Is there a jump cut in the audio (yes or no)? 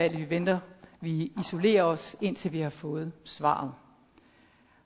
no